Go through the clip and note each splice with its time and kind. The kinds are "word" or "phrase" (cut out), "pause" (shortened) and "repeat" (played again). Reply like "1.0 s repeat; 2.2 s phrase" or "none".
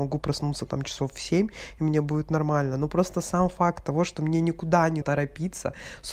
5.0 s word